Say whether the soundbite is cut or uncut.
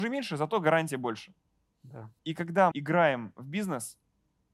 cut